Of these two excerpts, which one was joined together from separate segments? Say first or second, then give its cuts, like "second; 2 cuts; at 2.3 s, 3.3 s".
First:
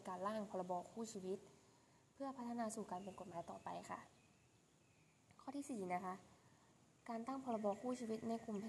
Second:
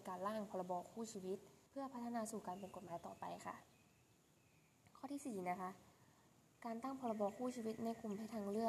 second; 1 cut; at 1.7 s